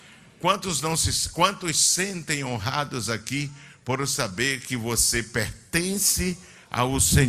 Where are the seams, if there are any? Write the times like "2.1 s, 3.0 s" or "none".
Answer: none